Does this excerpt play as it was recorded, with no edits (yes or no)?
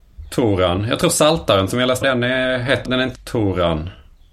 no